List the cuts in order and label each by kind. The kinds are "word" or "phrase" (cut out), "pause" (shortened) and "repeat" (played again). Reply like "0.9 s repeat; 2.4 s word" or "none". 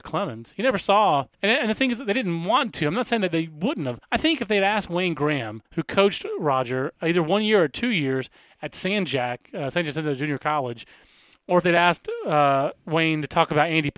1.3 s pause; 4.0 s pause; 5.6 s pause